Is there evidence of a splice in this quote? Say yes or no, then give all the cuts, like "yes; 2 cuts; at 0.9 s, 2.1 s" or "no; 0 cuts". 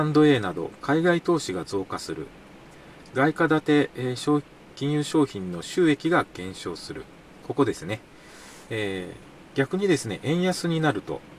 no; 0 cuts